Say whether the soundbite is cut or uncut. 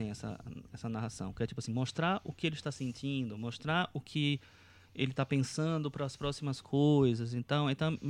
uncut